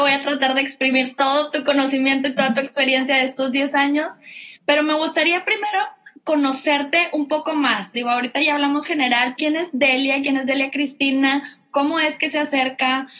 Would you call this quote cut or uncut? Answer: cut